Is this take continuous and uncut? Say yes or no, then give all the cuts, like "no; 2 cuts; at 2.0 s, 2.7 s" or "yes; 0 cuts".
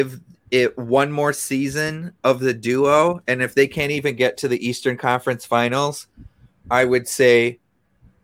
yes; 0 cuts